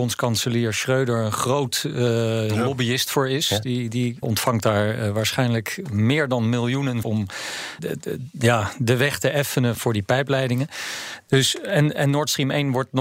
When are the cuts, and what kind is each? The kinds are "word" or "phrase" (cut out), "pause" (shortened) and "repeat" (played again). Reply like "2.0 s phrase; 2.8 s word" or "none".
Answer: 4.2 s word; 7.0 s word; 7.8 s word; 9.7 s word

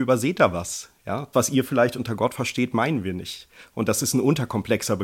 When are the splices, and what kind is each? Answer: 1.3 s word

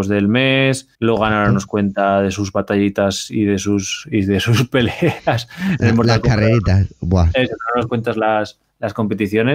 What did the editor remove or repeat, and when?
0.9 s pause

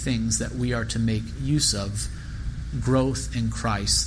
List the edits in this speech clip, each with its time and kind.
2.7 s word

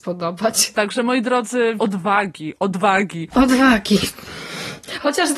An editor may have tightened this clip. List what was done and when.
1.8 s word

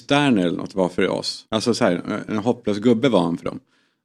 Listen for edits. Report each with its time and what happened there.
1.5 s pause

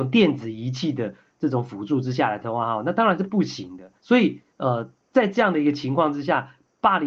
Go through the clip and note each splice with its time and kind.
4.0 s pause; 4.5 s pause

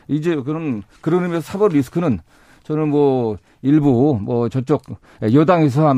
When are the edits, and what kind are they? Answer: none

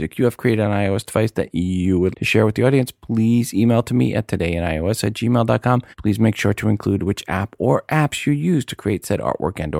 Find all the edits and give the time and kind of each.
2.1 s word; 5.9 s pause

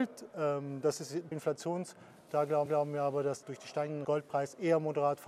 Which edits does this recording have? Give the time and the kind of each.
1.3 s word; 2.3 s word; 2.7 s repeat; 3.4 s word; 4.0 s phrase

